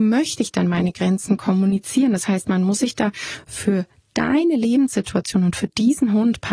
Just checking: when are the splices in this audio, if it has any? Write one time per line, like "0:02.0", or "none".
none